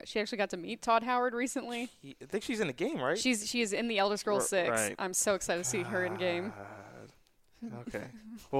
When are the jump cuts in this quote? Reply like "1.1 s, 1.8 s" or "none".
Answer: none